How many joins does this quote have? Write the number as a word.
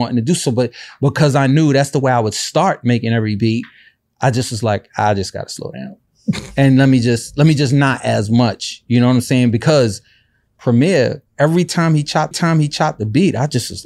two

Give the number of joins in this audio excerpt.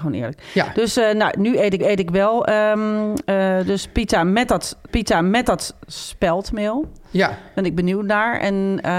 two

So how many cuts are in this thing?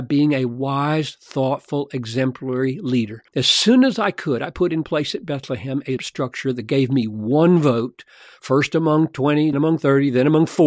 three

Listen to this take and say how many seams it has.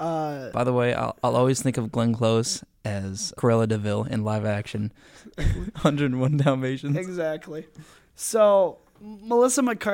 one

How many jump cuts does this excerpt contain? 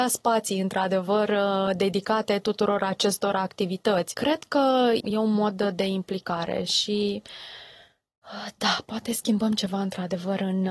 zero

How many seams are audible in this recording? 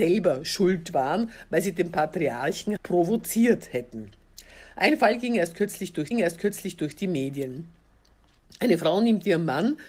two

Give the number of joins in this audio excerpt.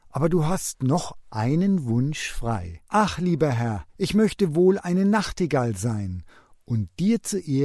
two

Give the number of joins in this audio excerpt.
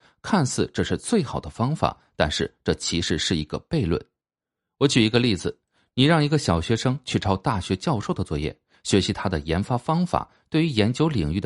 zero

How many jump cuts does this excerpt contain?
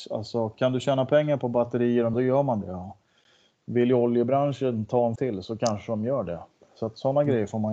two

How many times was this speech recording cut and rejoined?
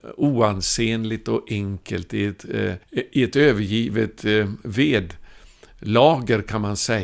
one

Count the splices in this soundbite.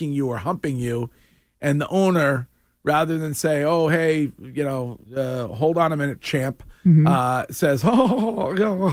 one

